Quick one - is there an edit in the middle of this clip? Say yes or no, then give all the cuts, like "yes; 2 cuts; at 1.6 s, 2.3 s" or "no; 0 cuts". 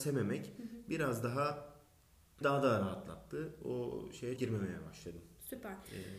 yes; 2 cuts; at 2.4 s, 4.4 s